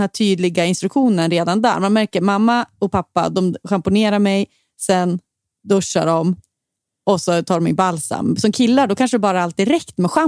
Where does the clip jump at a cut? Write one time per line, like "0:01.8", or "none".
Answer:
none